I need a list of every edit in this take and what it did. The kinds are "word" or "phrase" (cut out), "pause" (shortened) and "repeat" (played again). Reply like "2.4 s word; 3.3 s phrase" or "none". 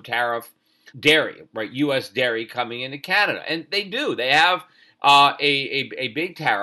0.9 s word